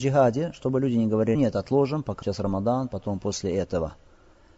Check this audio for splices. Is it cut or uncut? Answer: cut